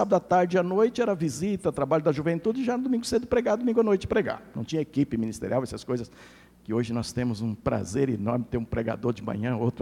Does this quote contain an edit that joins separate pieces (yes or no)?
no